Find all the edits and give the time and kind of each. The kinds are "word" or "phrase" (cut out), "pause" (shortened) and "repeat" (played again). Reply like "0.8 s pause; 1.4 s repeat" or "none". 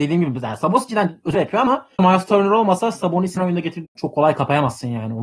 1.3 s word; 2.0 s word; 3.4 s word; 3.9 s word